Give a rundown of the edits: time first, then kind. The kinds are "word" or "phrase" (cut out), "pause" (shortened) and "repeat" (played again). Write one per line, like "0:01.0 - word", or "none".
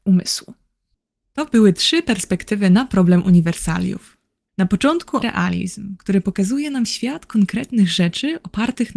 0:05.2 - word